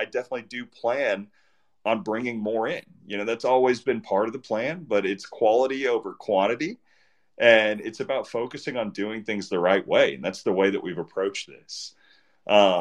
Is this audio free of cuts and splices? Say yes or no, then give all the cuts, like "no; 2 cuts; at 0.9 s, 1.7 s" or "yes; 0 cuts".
yes; 0 cuts